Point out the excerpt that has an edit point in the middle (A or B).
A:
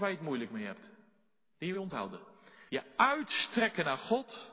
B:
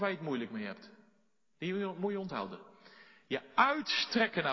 A